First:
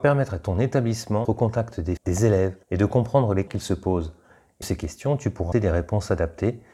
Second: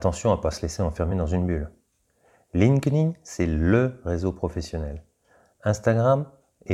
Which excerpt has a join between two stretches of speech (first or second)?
first